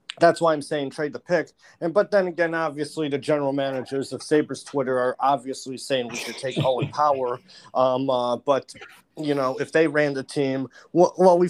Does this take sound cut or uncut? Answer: uncut